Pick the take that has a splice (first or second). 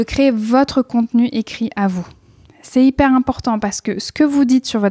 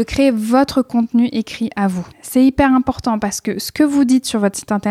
second